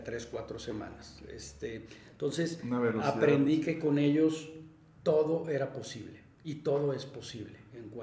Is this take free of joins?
yes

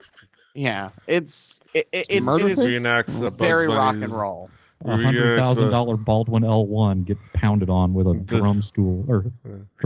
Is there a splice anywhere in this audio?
yes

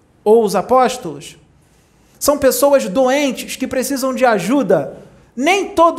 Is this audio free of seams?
yes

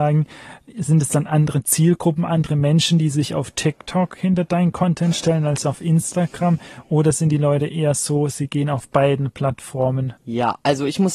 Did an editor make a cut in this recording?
yes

